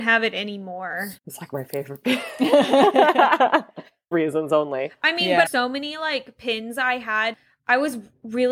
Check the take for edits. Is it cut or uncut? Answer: cut